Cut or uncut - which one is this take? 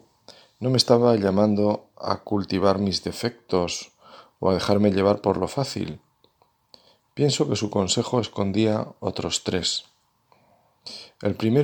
uncut